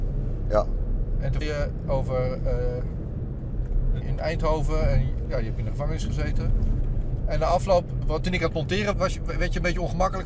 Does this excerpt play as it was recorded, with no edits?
no; 4 cuts; at 1.4 s, 4.0 s, 8.0 s, 8.9 s

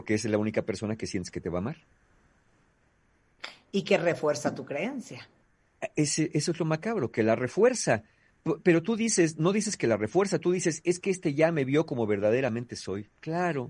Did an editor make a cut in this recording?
no; 0 cuts

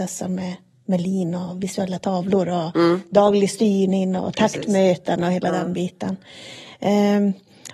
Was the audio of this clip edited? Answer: no; 0 cuts

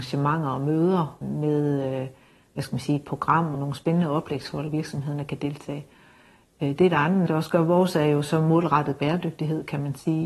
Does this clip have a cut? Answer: yes; 4 cuts; at 1.2 s, 3.5 s, 4.7 s, 7.3 s

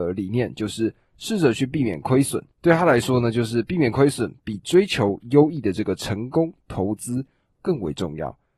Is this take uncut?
no; 1 cut; at 2.5 s

